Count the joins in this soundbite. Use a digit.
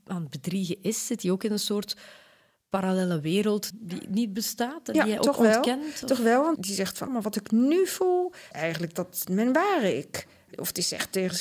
5